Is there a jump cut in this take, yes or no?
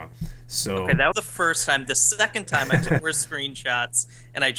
yes